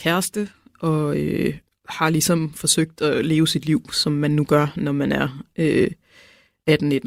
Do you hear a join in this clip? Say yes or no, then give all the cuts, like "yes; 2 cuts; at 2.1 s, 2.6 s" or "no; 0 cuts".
no; 0 cuts